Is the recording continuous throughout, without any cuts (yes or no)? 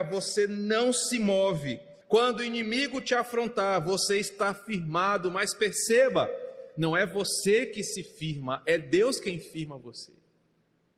no